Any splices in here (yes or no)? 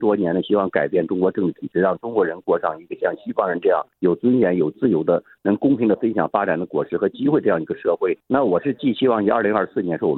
no